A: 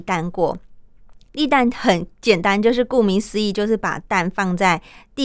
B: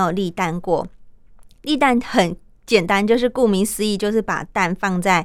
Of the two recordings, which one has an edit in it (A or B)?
A